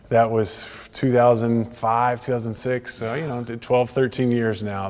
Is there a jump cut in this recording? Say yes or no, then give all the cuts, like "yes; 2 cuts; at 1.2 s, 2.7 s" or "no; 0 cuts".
no; 0 cuts